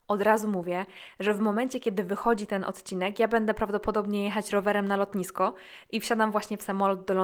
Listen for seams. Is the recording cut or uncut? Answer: uncut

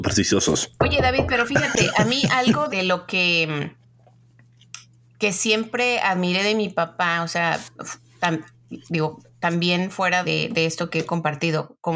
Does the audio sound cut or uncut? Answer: cut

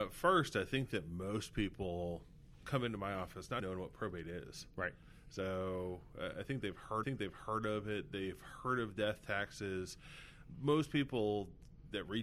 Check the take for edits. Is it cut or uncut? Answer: cut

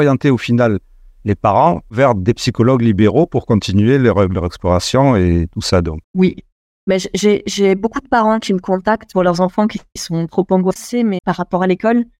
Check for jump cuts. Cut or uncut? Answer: uncut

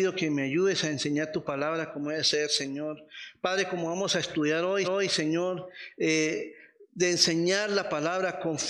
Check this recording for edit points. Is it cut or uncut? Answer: cut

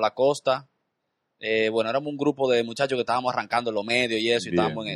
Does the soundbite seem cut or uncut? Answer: uncut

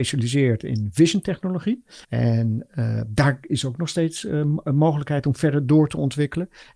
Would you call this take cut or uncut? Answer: cut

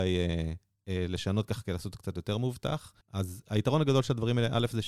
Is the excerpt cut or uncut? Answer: cut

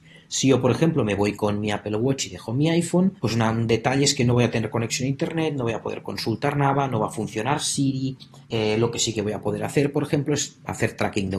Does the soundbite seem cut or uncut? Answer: cut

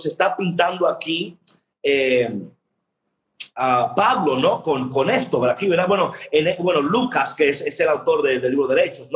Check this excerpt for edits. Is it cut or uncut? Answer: uncut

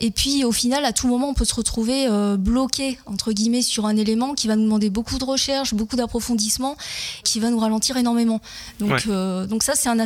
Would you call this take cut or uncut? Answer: cut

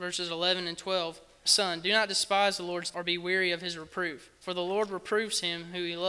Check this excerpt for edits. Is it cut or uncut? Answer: cut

